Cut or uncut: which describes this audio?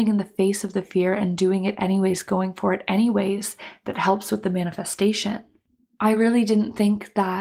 uncut